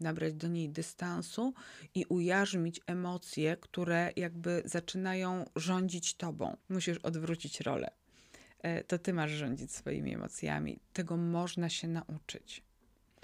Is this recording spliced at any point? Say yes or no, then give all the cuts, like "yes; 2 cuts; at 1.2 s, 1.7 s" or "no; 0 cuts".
yes; 1 cut; at 6.6 s